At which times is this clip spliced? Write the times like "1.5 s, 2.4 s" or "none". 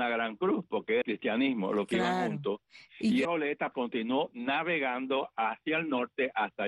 1.0 s, 2.9 s, 3.2 s, 3.7 s

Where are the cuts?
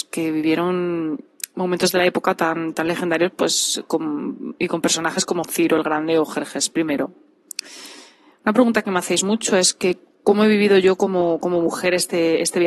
none

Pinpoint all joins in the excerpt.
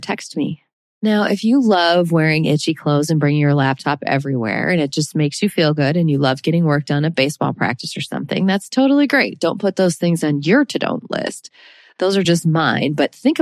none

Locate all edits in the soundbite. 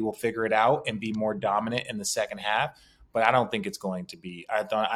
none

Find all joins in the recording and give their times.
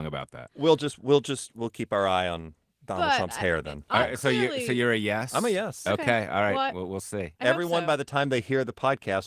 none

